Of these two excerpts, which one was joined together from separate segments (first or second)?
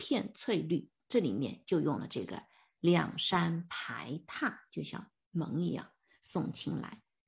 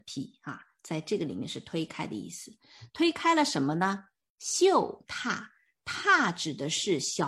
first